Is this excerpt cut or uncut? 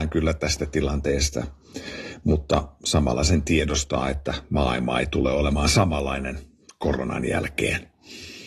uncut